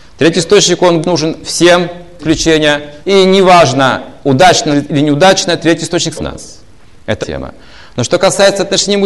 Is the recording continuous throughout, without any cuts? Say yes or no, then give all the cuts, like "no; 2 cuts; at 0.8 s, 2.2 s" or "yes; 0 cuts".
no; 6 cuts; at 1.0 s, 2.2 s, 3.0 s, 4.7 s, 6.2 s, 7.2 s